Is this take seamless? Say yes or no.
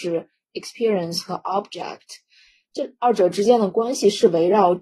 yes